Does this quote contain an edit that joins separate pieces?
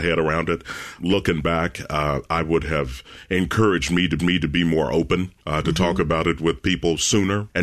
yes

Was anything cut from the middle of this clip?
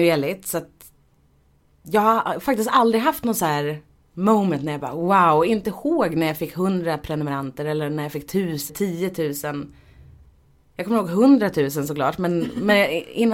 yes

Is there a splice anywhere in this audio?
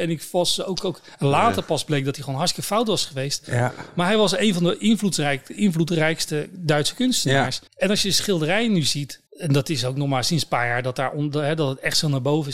yes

